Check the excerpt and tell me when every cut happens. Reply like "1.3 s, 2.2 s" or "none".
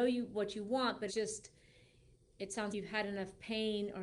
1.1 s, 2.7 s